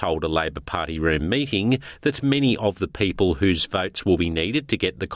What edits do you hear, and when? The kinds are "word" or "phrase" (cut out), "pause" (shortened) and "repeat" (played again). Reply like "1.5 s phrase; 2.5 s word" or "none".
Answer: none